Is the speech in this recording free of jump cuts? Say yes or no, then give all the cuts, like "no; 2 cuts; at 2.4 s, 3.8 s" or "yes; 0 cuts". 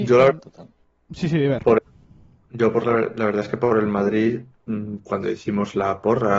yes; 0 cuts